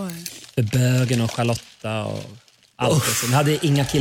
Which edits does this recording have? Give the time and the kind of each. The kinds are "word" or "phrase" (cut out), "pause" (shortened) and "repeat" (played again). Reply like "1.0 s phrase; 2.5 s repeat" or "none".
none